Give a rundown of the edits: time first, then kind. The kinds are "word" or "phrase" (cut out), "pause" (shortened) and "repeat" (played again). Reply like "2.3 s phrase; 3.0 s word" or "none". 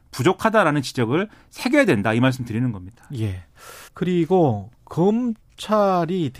3.9 s pause